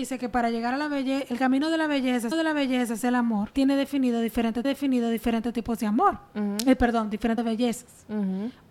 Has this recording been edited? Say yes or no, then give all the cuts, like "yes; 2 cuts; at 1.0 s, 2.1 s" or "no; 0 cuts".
yes; 4 cuts; at 2.3 s, 3.5 s, 4.6 s, 7.4 s